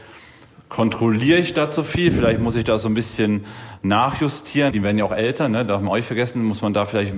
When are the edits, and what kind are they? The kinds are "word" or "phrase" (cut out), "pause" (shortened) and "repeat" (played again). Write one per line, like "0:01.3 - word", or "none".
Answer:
0:04.7 - phrase